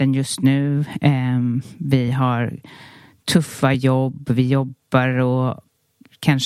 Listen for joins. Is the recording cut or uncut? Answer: uncut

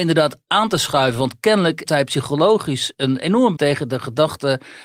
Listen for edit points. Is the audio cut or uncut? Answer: cut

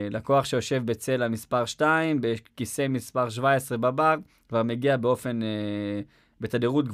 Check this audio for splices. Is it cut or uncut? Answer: uncut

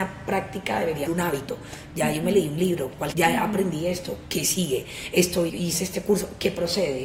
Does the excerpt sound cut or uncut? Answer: cut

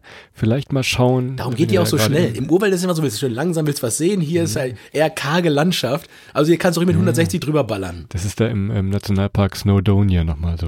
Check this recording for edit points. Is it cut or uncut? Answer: uncut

